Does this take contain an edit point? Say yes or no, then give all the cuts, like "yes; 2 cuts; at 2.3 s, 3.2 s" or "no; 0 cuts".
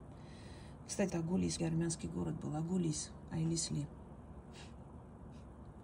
yes; 2 cuts; at 1.1 s, 1.6 s